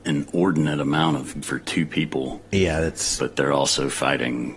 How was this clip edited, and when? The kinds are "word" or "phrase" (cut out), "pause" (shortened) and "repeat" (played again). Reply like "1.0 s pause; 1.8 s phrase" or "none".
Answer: 1.4 s word